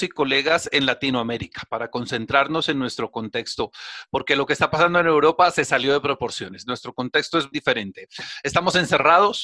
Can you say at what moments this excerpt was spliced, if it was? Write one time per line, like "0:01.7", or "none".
0:07.5